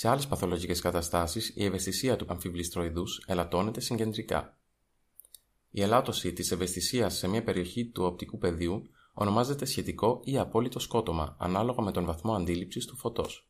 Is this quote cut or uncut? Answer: cut